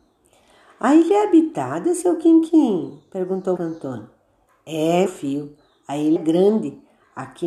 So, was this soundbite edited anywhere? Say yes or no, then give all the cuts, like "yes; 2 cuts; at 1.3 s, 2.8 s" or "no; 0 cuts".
yes; 3 cuts; at 3.6 s, 5.1 s, 6.2 s